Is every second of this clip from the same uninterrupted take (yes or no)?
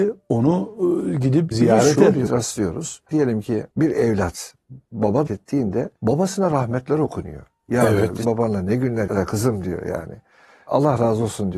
no